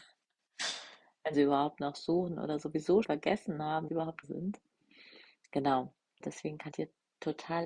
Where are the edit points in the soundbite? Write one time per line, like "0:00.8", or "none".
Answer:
0:01.3
0:03.0
0:03.9
0:04.2
0:06.2
0:06.7